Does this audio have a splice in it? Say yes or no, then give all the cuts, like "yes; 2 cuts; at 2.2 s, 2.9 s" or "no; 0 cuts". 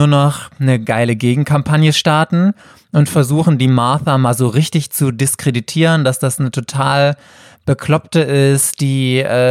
no; 0 cuts